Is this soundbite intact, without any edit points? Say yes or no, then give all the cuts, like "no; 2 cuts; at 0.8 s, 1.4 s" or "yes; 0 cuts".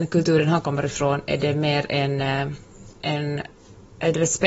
yes; 0 cuts